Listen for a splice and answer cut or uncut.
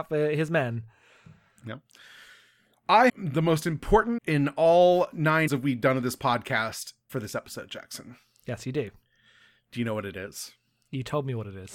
cut